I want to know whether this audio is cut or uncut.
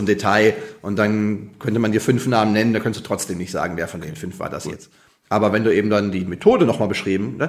uncut